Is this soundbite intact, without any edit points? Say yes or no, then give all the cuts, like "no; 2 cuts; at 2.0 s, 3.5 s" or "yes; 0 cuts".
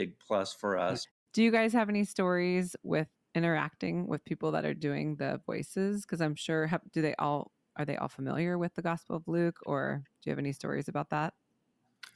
yes; 0 cuts